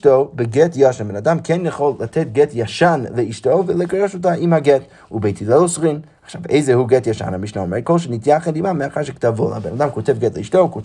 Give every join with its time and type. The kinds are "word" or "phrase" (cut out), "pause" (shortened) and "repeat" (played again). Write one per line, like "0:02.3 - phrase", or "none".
none